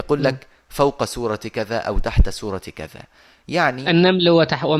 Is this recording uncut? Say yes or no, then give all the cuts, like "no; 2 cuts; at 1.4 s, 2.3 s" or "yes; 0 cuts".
yes; 0 cuts